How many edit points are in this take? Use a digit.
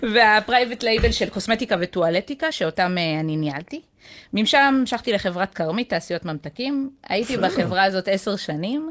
0